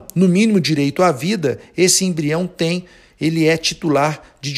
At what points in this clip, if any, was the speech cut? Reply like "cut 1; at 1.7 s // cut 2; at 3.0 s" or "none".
none